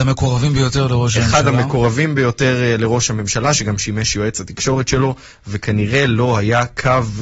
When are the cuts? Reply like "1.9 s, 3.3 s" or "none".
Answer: none